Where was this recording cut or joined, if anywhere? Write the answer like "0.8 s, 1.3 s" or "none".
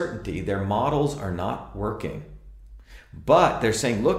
none